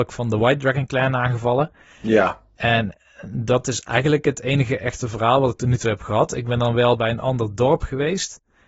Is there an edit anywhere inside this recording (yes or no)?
no